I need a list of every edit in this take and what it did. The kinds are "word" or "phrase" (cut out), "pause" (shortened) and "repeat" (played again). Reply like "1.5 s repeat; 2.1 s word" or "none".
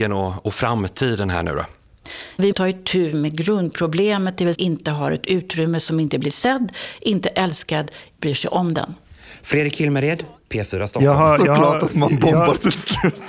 2.5 s word; 4.5 s phrase; 8.2 s word